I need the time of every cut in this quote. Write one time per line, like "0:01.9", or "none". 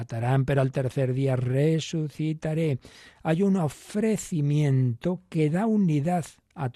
none

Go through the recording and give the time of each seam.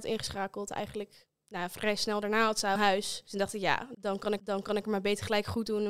0:02.8
0:04.4

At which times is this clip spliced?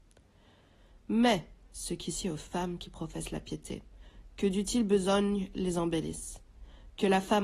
none

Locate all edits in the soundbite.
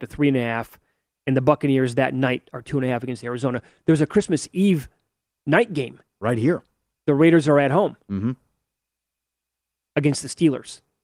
none

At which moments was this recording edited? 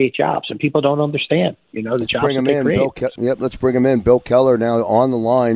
0:03.2

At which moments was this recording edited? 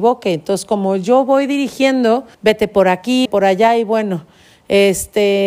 0:02.3
0:03.3

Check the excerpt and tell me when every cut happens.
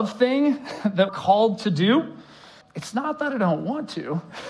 0:01.1
0:02.6

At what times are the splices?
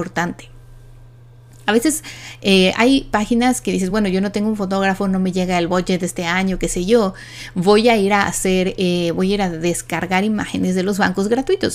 none

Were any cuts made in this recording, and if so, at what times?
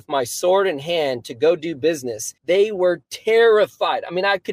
0:02.4

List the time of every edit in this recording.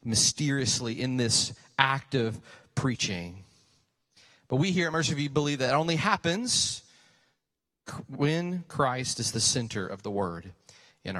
none

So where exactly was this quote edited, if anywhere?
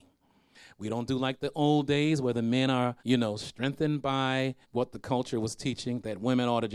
0:03.0
0:04.6

